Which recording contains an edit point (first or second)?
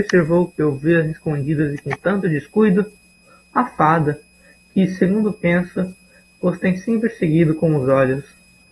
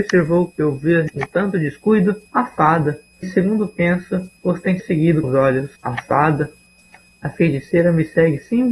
second